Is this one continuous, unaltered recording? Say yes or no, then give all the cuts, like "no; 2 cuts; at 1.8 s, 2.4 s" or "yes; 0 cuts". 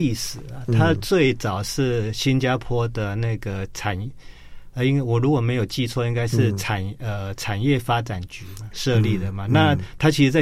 no; 1 cut; at 8.7 s